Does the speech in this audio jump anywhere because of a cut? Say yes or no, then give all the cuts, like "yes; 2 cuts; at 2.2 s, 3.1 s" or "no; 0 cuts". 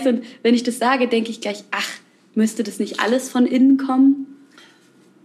no; 0 cuts